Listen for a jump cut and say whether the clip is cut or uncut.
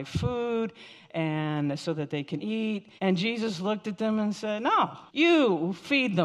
cut